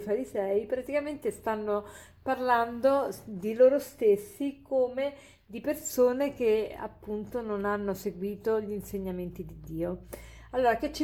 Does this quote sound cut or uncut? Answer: uncut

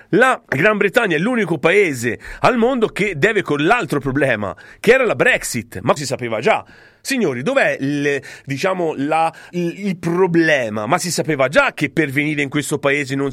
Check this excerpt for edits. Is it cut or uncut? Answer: cut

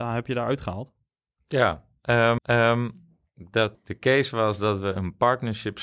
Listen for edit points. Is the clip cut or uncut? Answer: cut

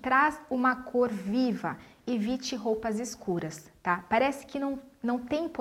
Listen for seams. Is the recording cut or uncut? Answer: uncut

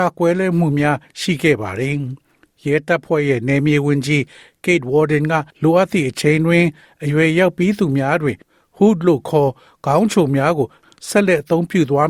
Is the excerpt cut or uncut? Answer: cut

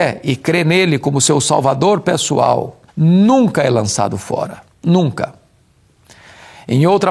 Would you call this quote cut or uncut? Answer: cut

